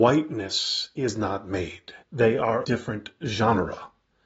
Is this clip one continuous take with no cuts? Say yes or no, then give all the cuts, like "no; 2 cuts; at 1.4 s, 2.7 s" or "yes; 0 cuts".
no; 2 cuts; at 2.0 s, 2.6 s